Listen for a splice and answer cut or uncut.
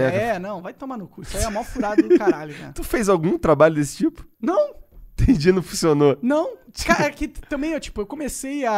cut